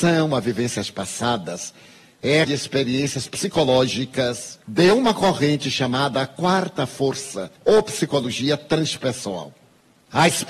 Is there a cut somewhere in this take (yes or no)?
yes